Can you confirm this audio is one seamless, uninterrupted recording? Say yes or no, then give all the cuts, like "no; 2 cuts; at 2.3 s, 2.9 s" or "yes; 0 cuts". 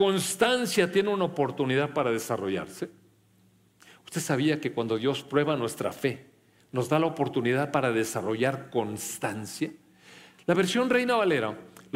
yes; 0 cuts